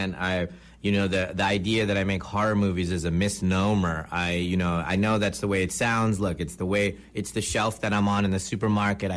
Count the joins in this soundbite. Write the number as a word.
zero